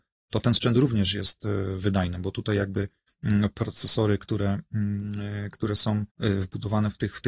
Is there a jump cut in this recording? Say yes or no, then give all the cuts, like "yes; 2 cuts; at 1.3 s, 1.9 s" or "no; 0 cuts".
yes; 1 cut; at 6.1 s